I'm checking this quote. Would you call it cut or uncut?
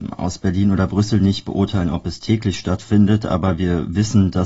uncut